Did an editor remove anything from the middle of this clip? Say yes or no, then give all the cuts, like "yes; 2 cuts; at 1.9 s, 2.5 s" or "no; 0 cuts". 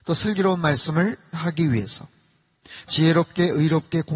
yes; 2 cuts; at 1.3 s, 2.9 s